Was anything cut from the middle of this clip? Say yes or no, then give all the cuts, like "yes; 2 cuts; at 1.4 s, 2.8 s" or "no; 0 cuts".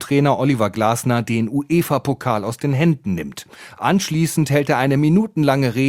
no; 0 cuts